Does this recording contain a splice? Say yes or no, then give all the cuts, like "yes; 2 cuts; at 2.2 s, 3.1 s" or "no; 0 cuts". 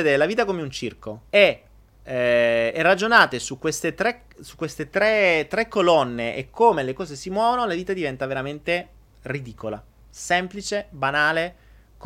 yes; 1 cut; at 1.3 s